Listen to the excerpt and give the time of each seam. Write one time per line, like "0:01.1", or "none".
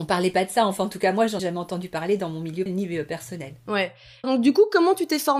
0:01.4
0:02.7
0:04.2